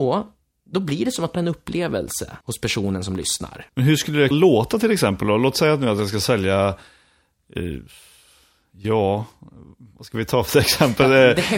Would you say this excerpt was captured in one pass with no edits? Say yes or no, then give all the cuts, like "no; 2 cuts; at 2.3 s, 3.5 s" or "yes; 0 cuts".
no; 4 cuts; at 1.3 s, 2.4 s, 3.7 s, 4.3 s